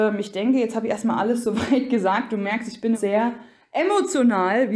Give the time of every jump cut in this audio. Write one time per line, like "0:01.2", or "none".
0:02.9